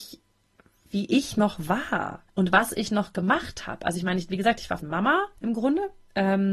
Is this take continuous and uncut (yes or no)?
no